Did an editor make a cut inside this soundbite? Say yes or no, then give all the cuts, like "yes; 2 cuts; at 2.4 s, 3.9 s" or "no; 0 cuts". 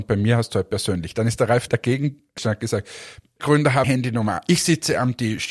yes; 4 cuts; at 1.7 s, 2.4 s, 3.4 s, 3.8 s